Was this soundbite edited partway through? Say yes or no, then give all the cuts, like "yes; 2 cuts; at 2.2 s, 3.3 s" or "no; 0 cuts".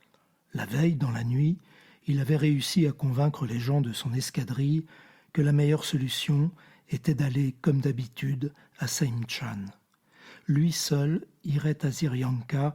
no; 0 cuts